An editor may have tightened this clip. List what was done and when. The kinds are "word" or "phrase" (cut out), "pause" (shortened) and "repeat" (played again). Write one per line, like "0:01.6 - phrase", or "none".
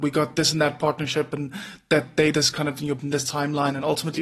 0:02.3 - word
0:03.0 - word